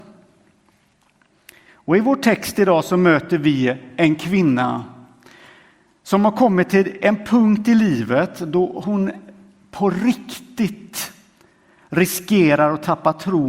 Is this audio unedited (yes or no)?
yes